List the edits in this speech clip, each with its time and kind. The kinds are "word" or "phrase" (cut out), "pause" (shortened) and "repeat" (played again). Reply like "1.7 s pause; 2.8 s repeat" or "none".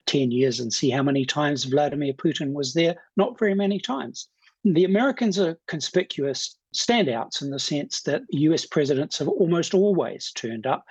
none